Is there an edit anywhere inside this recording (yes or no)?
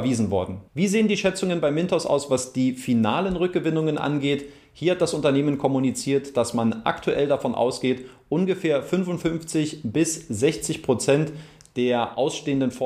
no